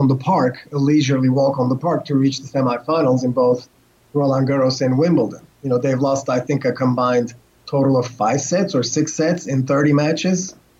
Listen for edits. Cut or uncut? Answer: uncut